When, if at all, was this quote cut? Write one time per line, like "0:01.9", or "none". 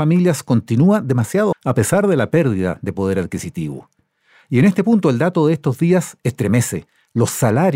0:01.5